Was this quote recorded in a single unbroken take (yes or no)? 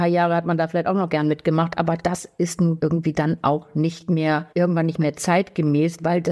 no